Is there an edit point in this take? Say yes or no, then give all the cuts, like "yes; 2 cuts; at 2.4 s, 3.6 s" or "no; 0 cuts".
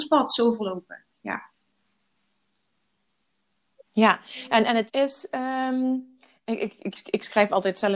yes; 1 cut; at 4.9 s